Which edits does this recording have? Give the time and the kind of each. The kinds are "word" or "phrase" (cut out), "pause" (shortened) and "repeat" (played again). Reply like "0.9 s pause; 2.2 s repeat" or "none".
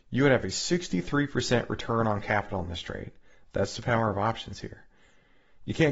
none